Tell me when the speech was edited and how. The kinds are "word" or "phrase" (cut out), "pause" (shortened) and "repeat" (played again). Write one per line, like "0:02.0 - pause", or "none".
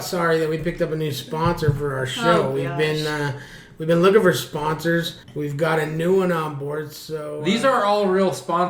0:05.2 - pause